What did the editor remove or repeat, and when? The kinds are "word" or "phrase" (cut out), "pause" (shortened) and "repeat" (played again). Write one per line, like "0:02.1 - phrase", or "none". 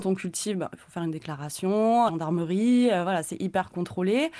0:02.1 - phrase